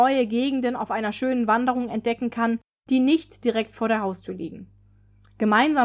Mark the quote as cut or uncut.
uncut